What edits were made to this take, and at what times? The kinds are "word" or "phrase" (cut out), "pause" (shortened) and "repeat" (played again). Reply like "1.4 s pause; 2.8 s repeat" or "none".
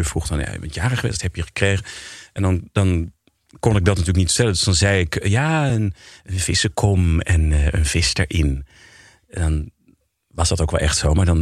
none